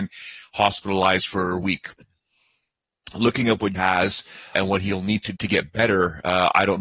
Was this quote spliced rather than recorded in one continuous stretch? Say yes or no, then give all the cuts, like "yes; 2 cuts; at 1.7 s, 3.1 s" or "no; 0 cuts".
yes; 4 cuts; at 1.6 s, 3.7 s, 4.5 s, 5.3 s